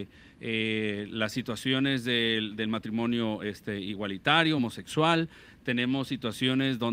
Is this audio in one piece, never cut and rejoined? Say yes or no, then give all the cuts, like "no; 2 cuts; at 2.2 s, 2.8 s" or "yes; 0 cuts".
yes; 0 cuts